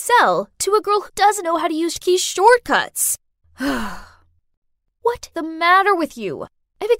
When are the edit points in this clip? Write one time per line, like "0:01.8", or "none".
0:01.1
0:01.4
0:01.9
0:05.3

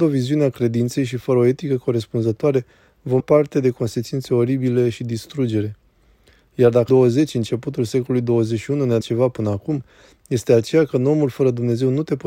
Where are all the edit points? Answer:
0:03.2
0:06.9
0:09.0

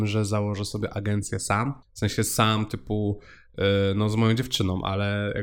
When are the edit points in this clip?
0:01.8

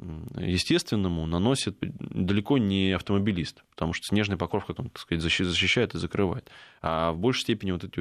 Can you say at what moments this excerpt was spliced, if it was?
0:01.8
0:03.7
0:04.8

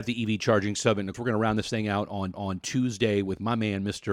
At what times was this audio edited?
0:01.1
0:02.3

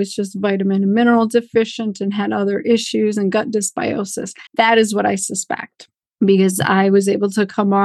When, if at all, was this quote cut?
0:04.5
0:06.0

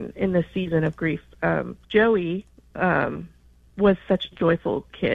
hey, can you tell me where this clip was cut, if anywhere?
0:01.8

